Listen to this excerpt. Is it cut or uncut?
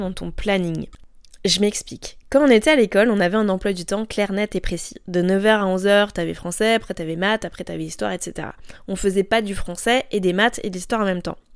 uncut